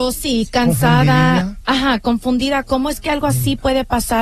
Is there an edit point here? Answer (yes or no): no